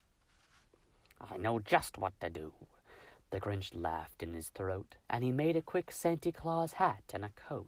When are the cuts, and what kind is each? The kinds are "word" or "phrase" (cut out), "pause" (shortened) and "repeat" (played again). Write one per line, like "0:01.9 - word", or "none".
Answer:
0:05.0 - pause